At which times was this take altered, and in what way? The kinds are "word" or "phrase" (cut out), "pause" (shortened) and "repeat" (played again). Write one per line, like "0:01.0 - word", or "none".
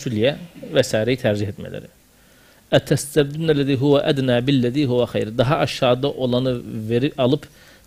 none